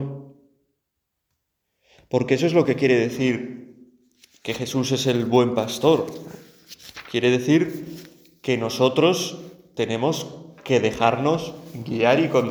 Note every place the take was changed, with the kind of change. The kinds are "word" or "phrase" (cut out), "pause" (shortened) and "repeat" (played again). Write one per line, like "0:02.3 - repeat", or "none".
none

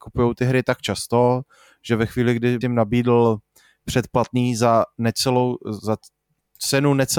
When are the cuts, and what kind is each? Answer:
0:02.6 - word

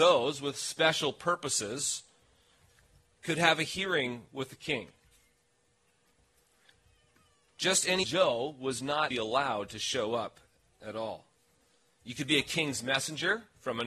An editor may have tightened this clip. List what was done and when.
0:08.0 - word
0:09.1 - word

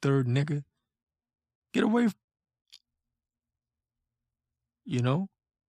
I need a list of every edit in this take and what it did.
0:02.1 - word

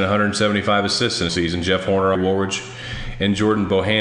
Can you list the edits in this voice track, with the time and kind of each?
0:01.3 - word
0:02.1 - word

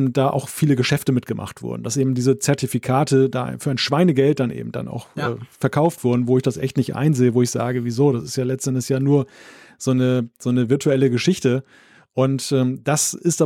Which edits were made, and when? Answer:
none

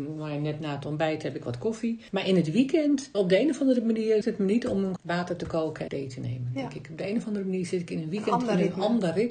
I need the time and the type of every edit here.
0:03.1 - word
0:04.2 - word
0:05.0 - word
0:05.9 - word

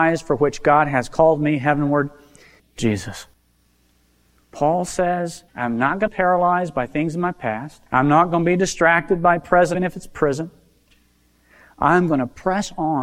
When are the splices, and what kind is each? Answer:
0:02.6 - phrase
0:05.5 - pause
0:06.1 - phrase
0:07.9 - pause
0:09.7 - word

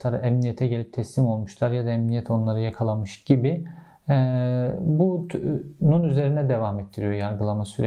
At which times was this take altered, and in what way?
none

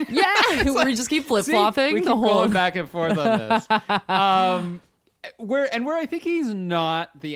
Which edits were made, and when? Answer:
none

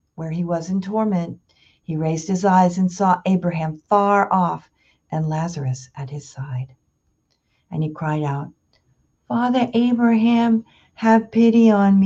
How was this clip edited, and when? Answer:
none

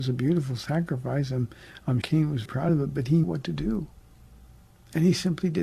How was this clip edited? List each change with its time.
0:02.0 - word
0:02.5 - word
0:03.2 - word

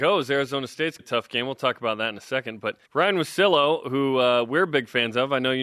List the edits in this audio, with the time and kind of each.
0:01.0 - phrase
0:02.8 - pause

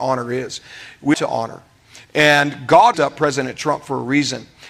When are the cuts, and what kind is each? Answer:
0:01.1 - word
0:02.9 - word

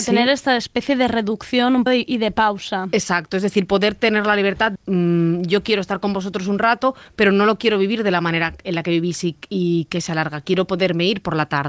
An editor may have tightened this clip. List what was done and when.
0:01.9 - word
0:04.8 - word

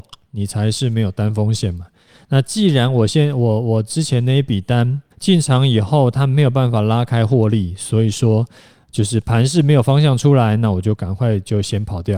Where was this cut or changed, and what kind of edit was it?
0:05.1 - pause

